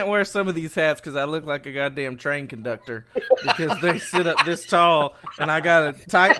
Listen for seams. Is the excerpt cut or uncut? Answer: uncut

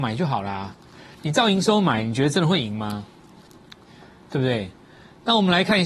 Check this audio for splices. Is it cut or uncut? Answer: uncut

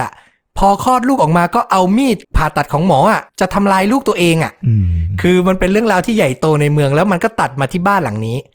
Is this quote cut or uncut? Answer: cut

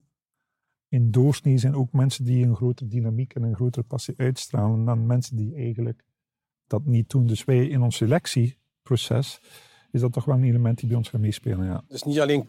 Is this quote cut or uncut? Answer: uncut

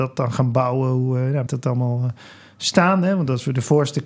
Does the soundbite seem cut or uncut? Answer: cut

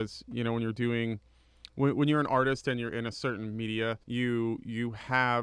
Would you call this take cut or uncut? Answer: cut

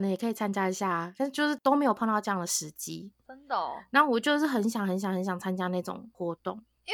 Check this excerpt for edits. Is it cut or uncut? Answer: uncut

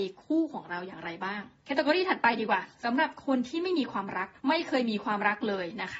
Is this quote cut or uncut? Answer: cut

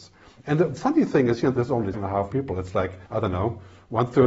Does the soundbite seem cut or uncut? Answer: cut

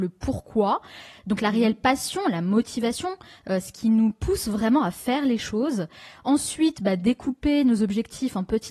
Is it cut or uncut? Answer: uncut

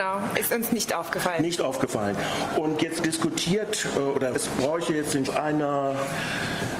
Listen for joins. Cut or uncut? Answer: cut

